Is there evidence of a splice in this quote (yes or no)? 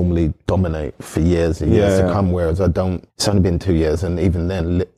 yes